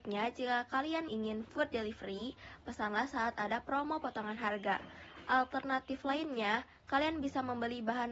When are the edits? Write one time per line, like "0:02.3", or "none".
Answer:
0:01.1